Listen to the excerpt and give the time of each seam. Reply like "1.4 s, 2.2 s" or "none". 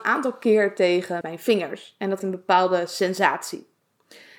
1.2 s, 2.2 s